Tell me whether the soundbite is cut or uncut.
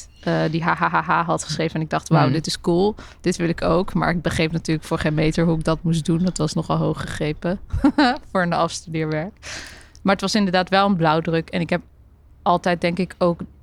uncut